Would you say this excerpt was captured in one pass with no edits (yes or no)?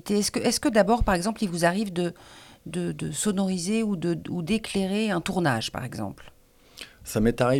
yes